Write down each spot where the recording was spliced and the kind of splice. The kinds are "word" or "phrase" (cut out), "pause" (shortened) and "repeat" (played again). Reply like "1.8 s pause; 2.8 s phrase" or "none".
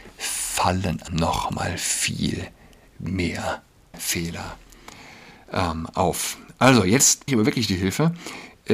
1.1 s word; 3.9 s word; 7.3 s word